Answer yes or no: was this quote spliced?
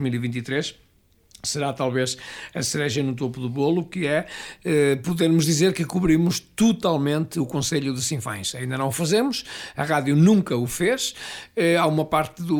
no